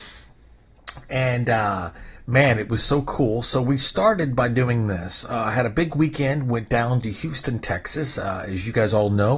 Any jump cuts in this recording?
no; 0 cuts

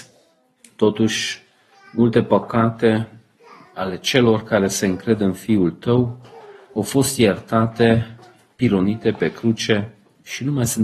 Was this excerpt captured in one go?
yes; 0 cuts

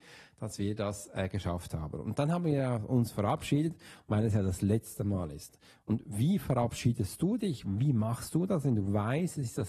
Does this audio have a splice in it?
no; 0 cuts

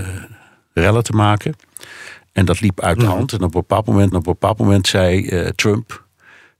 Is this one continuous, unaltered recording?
no; 1 cut; at 4.1 s

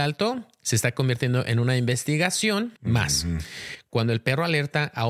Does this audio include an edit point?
yes; 1 cut; at 2.8 s

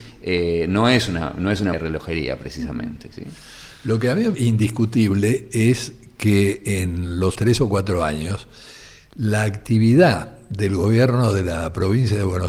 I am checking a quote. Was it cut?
yes; 3 cuts; at 1.7 s, 4.3 s, 7.3 s

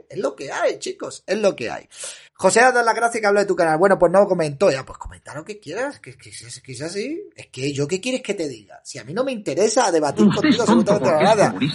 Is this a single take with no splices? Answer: no; 1 cut; at 2.3 s

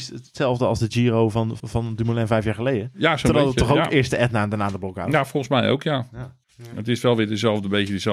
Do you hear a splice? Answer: yes; 2 cuts; at 1.6 s, 6.4 s

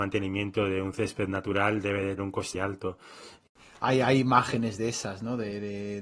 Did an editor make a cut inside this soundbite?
yes; 2 cuts; at 2.2 s, 2.5 s

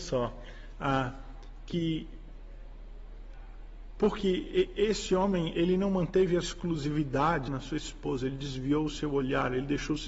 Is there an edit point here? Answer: yes; 3 cuts; at 5.5 s, 6.4 s, 7.5 s

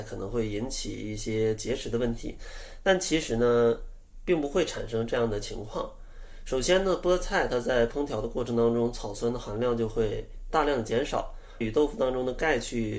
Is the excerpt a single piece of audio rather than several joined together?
no; 1 cut; at 11.6 s

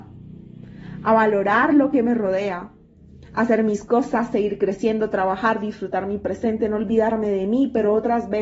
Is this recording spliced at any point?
no; 0 cuts

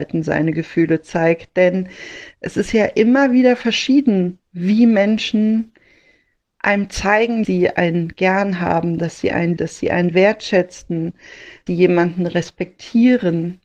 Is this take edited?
yes; 4 cuts; at 4.5 s, 7.4 s, 9.6 s, 11.7 s

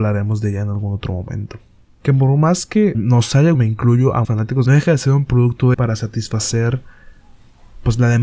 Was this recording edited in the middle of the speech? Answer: yes; 6 cuts; at 1.8 s, 2.9 s, 3.5 s, 4.2 s, 4.7 s, 5.7 s

